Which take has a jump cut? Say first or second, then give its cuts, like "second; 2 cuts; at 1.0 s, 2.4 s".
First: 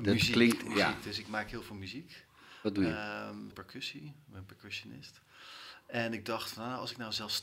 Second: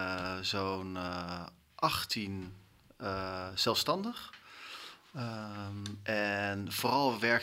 first; 1 cut; at 3.5 s